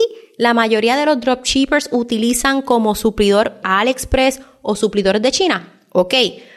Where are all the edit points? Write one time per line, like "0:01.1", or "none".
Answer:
0:03.6